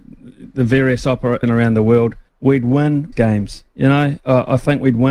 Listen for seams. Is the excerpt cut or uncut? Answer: cut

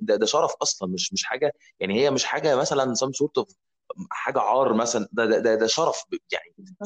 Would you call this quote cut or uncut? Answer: uncut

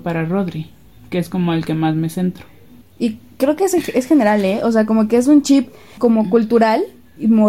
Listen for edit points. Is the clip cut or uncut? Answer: cut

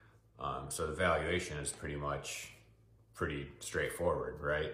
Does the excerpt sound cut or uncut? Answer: uncut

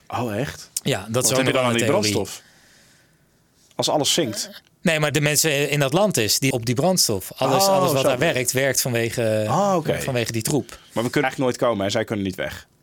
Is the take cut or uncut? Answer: cut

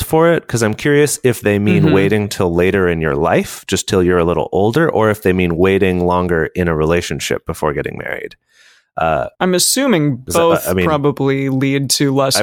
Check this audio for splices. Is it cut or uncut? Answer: cut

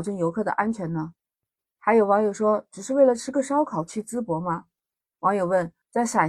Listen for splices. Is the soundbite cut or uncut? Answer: uncut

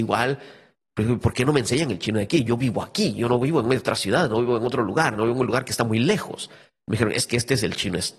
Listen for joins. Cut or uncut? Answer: uncut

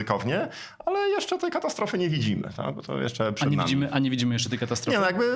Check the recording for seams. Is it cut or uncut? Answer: uncut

